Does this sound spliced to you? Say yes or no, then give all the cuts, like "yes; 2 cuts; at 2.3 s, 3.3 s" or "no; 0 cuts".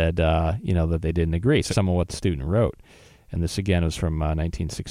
yes; 2 cuts; at 1.7 s, 2.1 s